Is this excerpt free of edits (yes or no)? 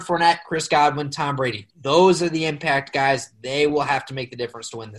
yes